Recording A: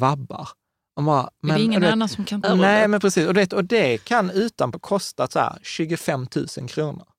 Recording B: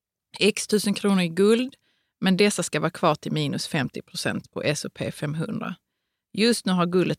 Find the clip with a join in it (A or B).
A